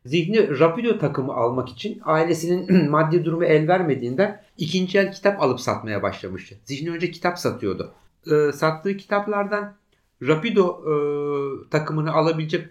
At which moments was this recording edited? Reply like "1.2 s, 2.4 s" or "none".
4.5 s, 8.1 s